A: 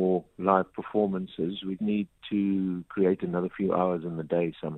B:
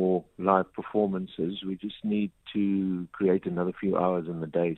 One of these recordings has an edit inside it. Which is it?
A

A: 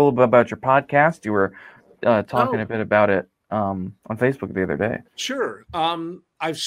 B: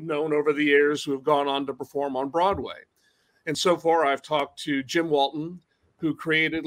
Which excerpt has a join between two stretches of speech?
A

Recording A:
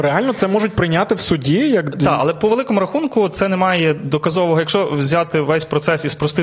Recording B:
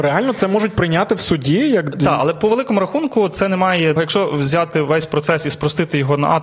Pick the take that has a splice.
B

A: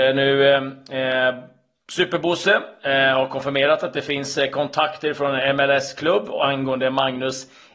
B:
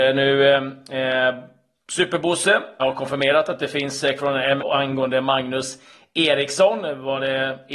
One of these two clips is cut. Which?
B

